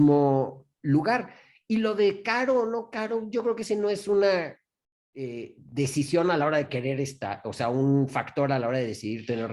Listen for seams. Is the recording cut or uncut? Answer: uncut